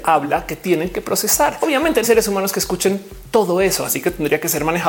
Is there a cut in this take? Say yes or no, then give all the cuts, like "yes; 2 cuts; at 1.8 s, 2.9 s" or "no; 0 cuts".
yes; 1 cut; at 2.0 s